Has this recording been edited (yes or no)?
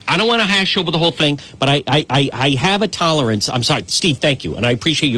no